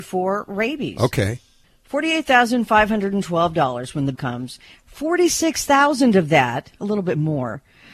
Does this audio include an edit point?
yes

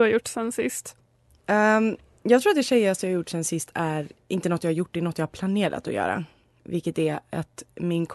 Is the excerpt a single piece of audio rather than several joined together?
yes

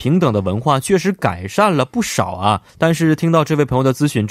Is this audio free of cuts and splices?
no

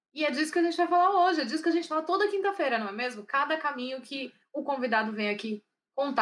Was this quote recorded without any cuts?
yes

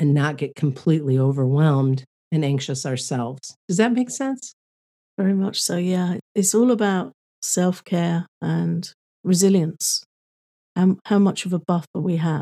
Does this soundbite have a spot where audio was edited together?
yes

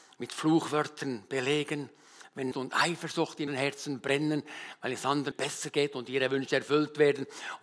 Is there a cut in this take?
yes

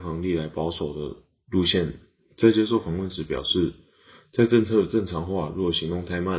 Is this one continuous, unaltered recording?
yes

